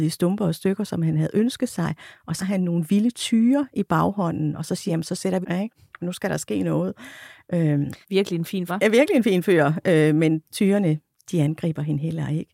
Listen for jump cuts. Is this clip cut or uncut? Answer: cut